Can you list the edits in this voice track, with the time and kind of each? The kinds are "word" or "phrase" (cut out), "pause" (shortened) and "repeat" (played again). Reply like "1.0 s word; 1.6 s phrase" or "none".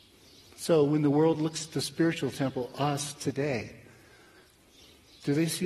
none

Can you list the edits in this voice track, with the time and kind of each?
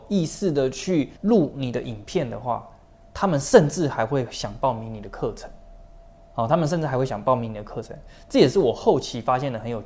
1.2 s pause

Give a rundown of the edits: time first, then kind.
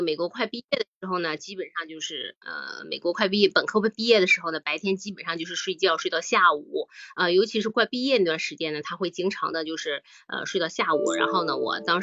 none

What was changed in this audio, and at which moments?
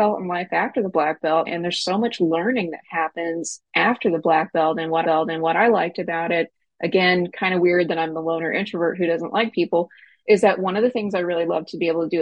1.5 s word; 5.0 s repeat

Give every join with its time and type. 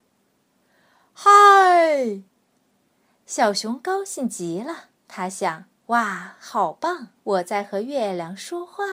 2.3 s pause; 5.0 s pause; 5.8 s pause; 7.2 s pause

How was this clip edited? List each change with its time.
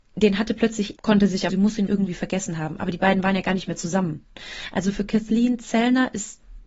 1.0 s word; 1.5 s phrase; 1.9 s word

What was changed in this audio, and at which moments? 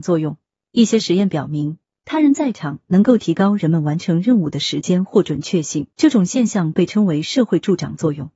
5.9 s pause

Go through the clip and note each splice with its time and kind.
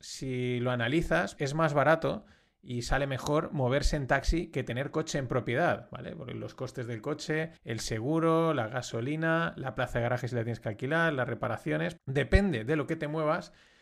1.4 s word; 7.6 s pause; 12.0 s word

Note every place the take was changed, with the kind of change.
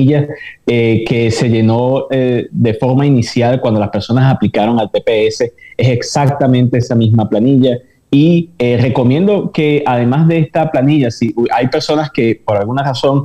none

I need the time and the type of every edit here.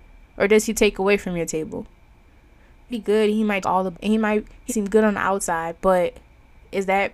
2.9 s word; 3.6 s word; 3.9 s word; 4.7 s word

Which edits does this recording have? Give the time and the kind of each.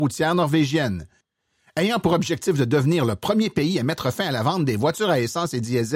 none

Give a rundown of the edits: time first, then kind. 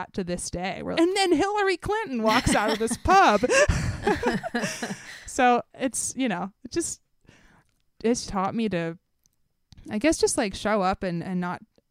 0.9 s word; 5.7 s pause; 8.3 s word

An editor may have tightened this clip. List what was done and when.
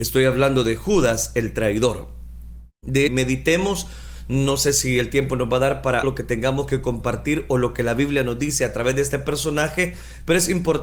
3.1 s phrase; 6.0 s phrase

